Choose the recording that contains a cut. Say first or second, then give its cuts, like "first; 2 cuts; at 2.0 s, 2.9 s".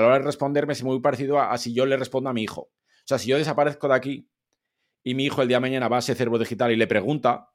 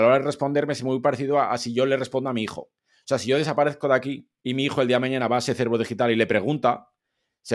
second; 1 cut; at 4.4 s